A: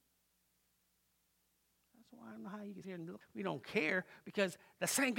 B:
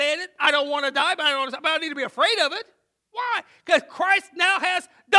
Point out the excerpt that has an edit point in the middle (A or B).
A